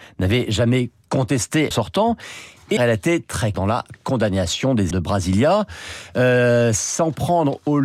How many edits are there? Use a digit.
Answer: 4